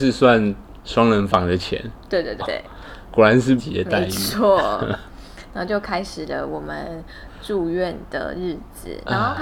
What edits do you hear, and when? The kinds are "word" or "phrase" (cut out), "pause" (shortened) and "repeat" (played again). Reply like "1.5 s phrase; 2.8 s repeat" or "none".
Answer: 2.4 s word; 3.6 s word

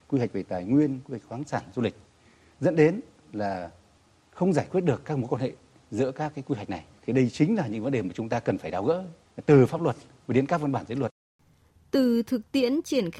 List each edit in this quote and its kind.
none

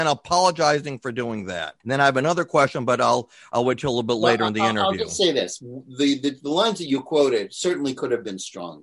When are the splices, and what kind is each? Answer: 1.8 s pause

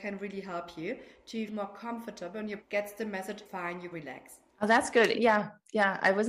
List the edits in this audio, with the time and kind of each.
1.5 s word; 2.6 s word; 3.5 s word; 3.9 s word; 4.5 s pause; 5.1 s word

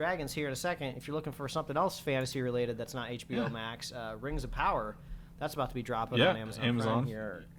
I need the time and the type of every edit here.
none

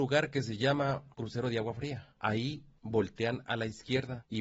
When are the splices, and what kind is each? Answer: 2.1 s pause

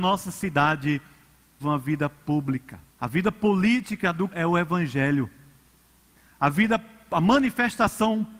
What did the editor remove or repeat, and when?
1.6 s phrase; 2.9 s pause; 4.3 s word

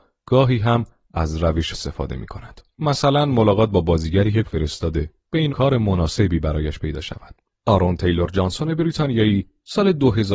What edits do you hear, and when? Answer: 1.7 s phrase; 4.4 s word; 5.5 s phrase; 7.5 s pause

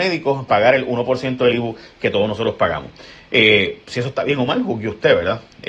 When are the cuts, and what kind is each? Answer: none

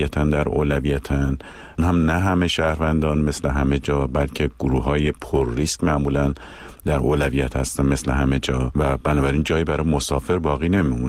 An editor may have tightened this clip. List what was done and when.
1.8 s phrase

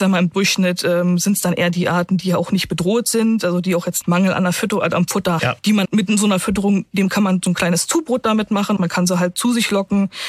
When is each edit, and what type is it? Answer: 4.0 s word; 5.4 s word; 5.8 s word; 8.8 s phrase

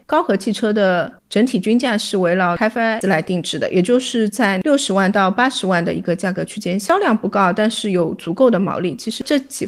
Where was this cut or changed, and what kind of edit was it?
1.2 s pause; 3.0 s word

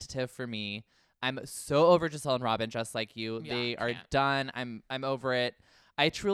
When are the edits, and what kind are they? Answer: none

